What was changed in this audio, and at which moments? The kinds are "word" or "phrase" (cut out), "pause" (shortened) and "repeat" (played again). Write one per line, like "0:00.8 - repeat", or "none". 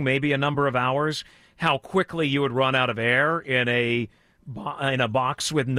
none